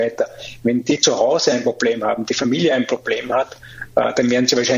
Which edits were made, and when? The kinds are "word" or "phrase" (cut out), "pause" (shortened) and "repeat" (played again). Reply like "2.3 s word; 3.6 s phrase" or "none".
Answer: none